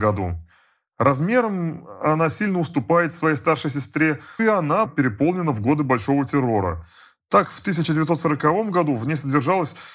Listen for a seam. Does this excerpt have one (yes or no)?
yes